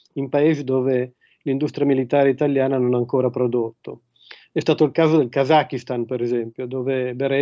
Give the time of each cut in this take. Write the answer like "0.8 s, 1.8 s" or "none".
none

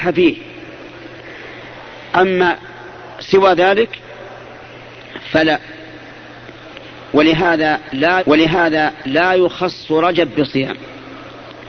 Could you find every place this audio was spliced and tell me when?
8.2 s

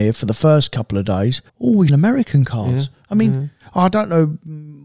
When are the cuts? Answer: 1.5 s, 1.9 s

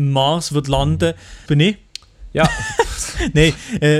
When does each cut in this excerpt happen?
1.5 s

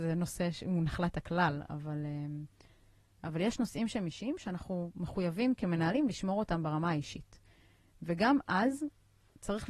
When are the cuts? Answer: none

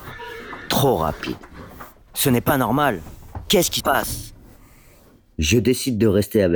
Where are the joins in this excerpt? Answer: 3.8 s

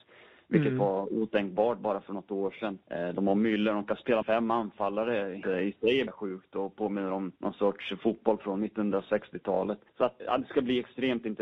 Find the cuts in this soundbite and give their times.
2.8 s, 4.2 s, 5.4 s, 6.1 s, 7.4 s, 9.9 s, 10.2 s

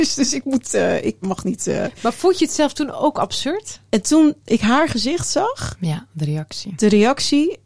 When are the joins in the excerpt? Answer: 1.2 s

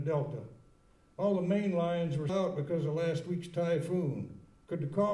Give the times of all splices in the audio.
2.3 s

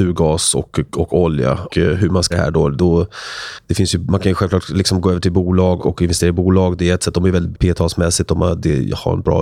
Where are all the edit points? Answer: 1.7 s, 2.3 s, 5.8 s, 7.5 s

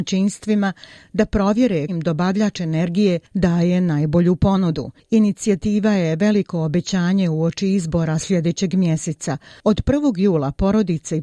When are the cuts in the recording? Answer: 1.9 s

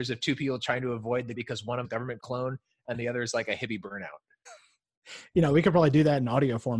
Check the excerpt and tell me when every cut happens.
1.3 s, 1.8 s, 2.2 s, 4.5 s

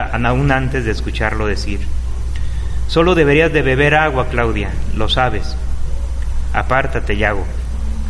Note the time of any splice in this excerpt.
none

